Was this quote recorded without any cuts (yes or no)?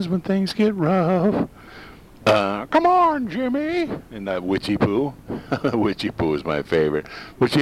yes